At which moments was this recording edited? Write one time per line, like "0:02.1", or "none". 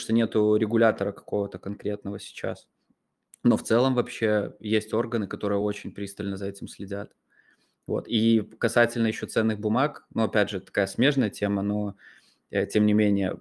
none